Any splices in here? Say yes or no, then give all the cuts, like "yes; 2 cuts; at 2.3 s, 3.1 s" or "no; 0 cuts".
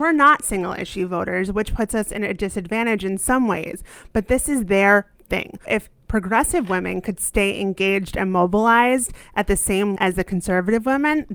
yes; 2 cuts; at 5.6 s, 10.0 s